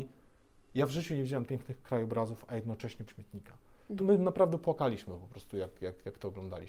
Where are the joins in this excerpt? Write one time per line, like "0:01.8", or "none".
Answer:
0:01.5
0:03.1
0:04.0